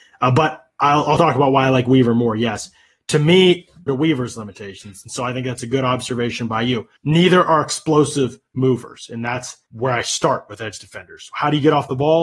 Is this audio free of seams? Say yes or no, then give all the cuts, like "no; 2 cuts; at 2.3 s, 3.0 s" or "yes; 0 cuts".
no; 4 cuts; at 1.2 s, 3.9 s, 7.0 s, 9.7 s